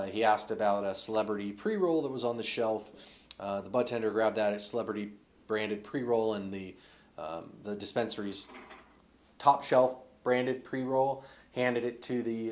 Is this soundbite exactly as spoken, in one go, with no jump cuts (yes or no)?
yes